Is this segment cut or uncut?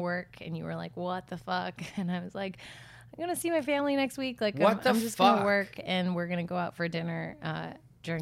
uncut